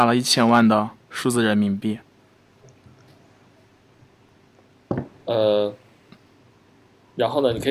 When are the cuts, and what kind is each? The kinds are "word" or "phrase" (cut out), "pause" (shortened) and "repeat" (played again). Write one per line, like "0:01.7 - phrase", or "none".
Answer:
none